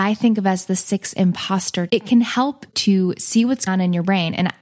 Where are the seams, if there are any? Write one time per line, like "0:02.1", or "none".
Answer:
0:01.9
0:02.7
0:03.7